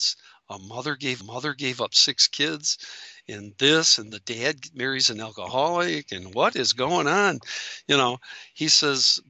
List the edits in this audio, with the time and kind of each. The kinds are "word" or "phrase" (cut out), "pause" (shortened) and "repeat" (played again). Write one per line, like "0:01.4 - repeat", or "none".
0:01.2 - repeat
0:04.1 - word